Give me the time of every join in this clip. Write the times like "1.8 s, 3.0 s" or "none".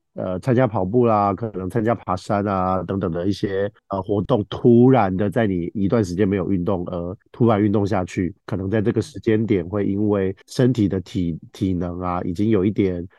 3.8 s, 7.2 s, 8.4 s, 10.4 s